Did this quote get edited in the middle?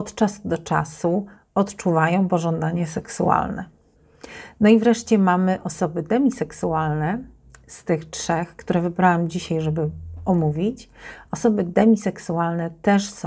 no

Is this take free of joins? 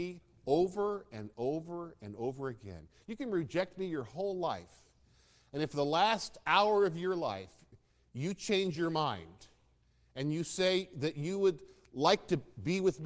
yes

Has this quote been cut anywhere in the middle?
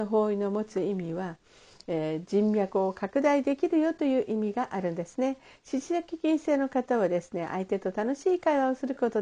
no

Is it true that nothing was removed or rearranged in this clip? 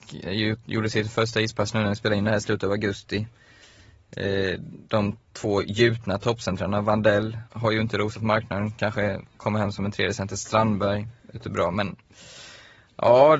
no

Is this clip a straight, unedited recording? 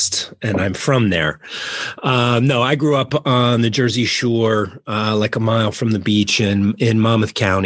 yes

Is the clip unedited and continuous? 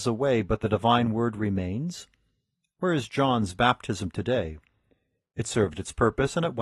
yes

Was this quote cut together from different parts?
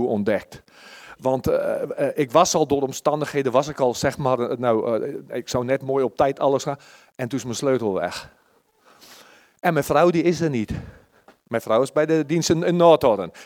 no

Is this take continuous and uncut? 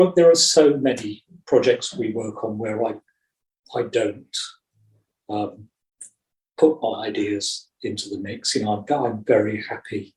yes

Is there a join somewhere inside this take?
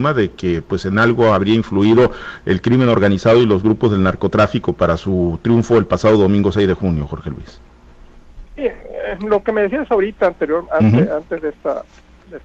no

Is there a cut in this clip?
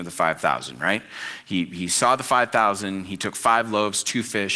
no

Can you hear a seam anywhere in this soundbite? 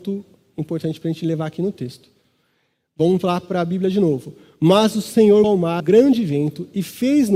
yes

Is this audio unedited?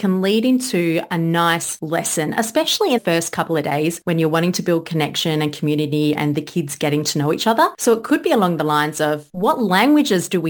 no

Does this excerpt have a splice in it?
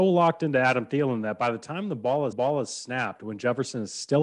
yes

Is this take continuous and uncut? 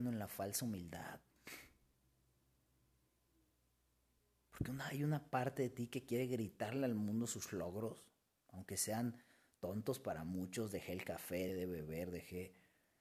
no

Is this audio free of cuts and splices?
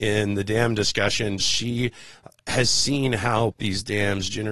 no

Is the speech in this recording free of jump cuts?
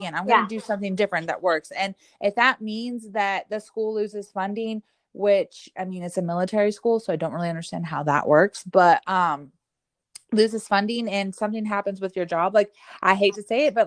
yes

